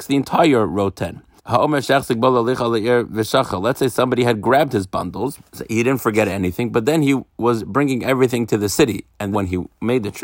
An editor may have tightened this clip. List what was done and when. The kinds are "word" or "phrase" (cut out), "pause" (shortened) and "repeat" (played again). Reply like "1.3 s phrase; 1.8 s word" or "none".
1.4 s pause; 5.5 s pause; 9.3 s word